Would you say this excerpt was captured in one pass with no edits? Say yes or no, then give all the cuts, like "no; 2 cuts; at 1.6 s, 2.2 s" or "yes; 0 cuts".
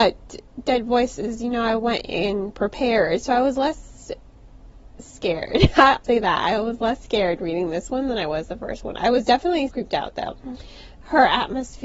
no; 2 cuts; at 6.0 s, 9.7 s